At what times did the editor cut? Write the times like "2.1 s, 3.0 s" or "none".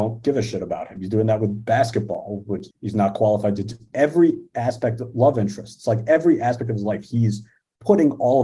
2.7 s